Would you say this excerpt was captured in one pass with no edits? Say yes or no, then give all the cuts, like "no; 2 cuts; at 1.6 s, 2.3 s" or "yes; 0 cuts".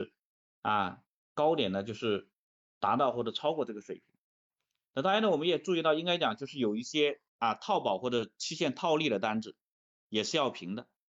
no; 2 cuts; at 4.6 s, 7.3 s